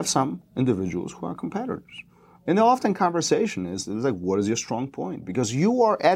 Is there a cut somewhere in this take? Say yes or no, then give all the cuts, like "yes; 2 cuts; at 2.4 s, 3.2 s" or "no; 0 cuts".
no; 0 cuts